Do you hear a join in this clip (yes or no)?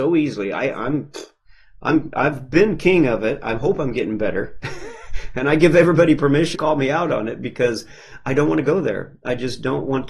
yes